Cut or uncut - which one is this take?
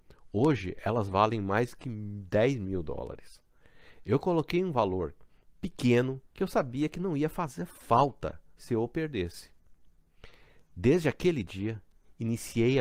cut